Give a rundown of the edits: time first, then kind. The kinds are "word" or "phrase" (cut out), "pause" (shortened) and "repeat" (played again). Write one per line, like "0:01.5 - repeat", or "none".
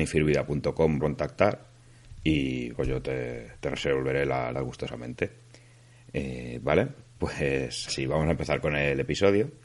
0:01.0 - word
0:02.7 - word
0:04.5 - word
0:07.9 - word